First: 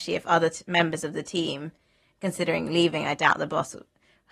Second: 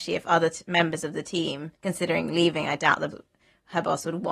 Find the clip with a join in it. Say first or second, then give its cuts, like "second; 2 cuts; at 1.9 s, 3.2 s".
second; 2 cuts; at 1.7 s, 3.1 s